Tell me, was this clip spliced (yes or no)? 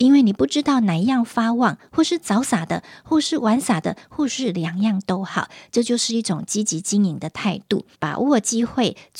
yes